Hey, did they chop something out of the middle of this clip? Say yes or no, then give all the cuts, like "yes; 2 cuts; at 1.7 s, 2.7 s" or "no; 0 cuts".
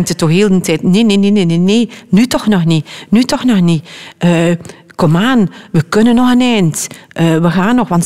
no; 0 cuts